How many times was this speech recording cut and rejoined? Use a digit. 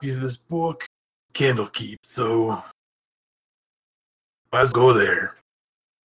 3